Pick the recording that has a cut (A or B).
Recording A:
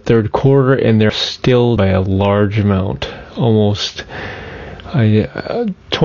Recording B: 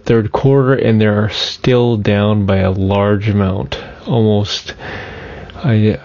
A